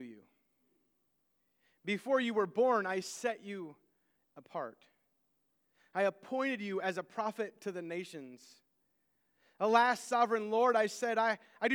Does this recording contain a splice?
no; 0 cuts

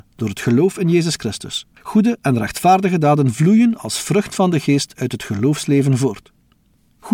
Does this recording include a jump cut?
yes; 1 cut; at 1.7 s

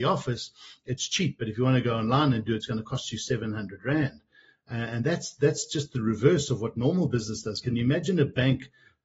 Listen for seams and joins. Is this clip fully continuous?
yes; 0 cuts

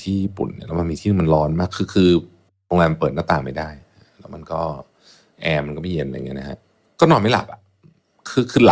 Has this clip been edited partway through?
no; 0 cuts

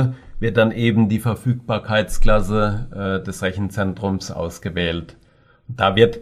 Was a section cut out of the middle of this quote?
no; 0 cuts

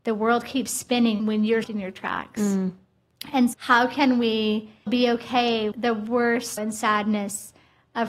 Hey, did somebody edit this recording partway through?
yes; 6 cuts; at 1.2 s, 1.6 s, 3.5 s, 4.9 s, 5.7 s, 6.6 s

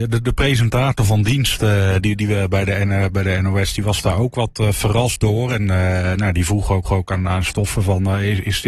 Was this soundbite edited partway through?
yes; 1 cut; at 6.8 s

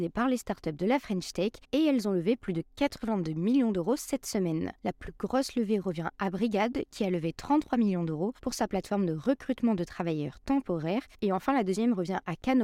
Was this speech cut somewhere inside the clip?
yes; 3 cuts; at 1.6 s, 4.8 s, 8.4 s

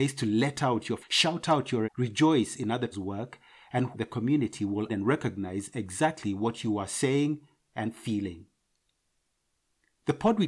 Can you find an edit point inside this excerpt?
yes; 5 cuts; at 1.0 s, 1.8 s, 2.9 s, 3.9 s, 4.9 s

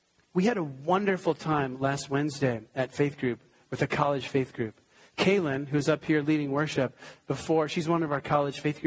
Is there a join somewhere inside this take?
no; 0 cuts

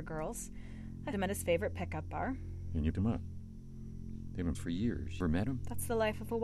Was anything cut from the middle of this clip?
yes; 4 cuts; at 1.1 s, 2.9 s, 4.5 s, 5.2 s

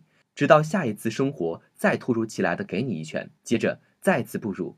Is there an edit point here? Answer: yes; 1 cut; at 3.4 s

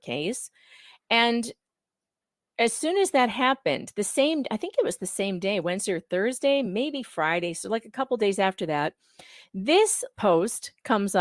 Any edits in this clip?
no; 0 cuts

